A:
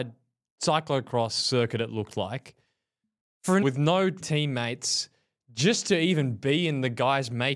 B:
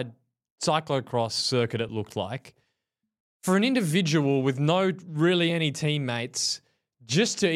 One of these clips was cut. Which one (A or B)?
A